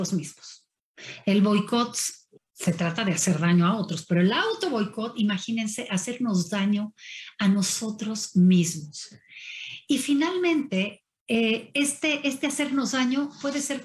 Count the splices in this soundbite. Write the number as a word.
one